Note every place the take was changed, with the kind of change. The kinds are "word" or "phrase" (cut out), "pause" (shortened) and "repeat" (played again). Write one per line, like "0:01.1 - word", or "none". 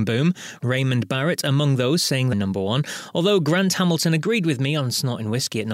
0:02.3 - phrase